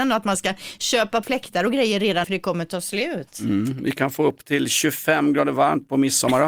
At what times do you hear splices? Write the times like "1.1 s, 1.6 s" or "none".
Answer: 1.2 s, 2.2 s